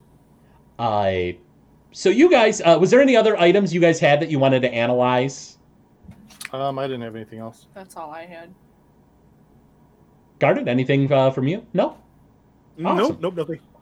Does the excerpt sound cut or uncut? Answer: uncut